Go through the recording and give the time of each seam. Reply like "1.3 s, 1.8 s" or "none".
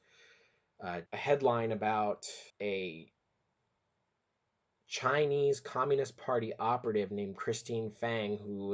1.1 s, 2.5 s